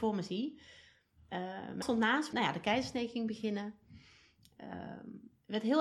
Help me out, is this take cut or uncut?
cut